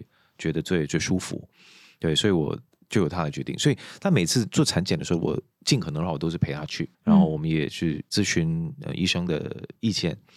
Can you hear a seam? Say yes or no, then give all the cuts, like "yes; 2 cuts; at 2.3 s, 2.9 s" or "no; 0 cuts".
yes; 1 cut; at 6.9 s